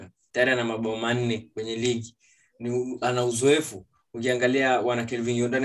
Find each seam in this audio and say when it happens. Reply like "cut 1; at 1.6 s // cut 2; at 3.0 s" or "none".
none